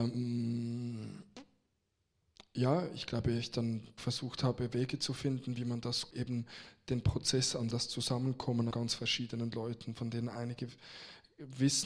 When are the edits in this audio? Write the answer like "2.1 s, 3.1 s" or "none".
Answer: 4.0 s, 6.1 s, 7.7 s, 8.7 s